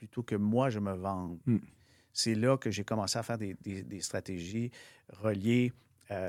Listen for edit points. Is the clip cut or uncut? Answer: uncut